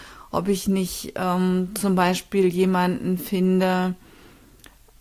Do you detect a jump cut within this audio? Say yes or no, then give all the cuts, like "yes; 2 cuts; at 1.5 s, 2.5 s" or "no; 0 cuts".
no; 0 cuts